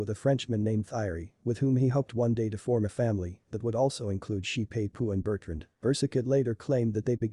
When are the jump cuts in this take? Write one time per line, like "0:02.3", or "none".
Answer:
0:05.7